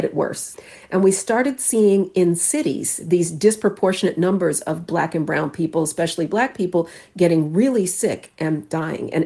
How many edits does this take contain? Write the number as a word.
zero